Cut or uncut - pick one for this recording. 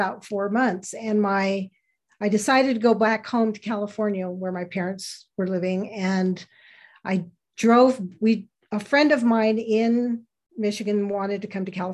uncut